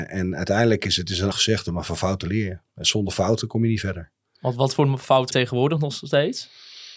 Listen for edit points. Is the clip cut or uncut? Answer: cut